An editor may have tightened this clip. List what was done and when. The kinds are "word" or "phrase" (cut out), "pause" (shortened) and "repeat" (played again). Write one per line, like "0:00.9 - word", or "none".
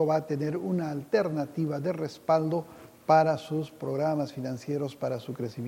none